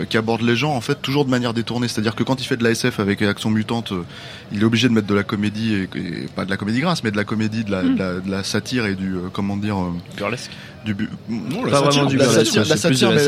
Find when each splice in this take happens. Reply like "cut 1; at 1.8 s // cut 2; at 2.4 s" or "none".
cut 1; at 1.0 s